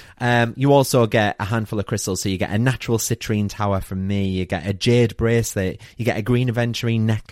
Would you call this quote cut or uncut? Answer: uncut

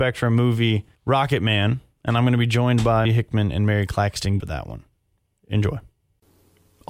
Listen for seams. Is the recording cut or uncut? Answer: cut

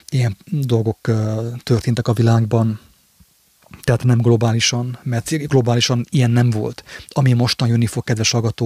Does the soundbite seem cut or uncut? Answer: uncut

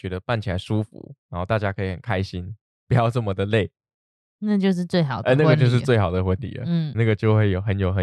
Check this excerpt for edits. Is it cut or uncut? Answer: cut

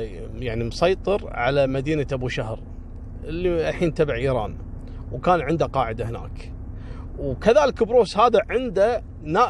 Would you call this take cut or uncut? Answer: uncut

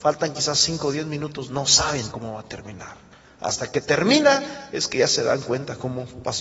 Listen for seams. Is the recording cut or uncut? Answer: cut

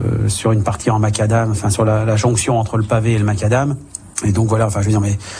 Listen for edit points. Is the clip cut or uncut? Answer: cut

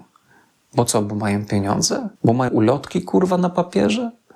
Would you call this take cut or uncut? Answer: cut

